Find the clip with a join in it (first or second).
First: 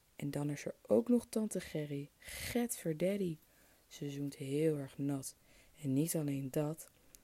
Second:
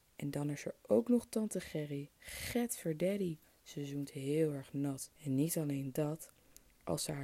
second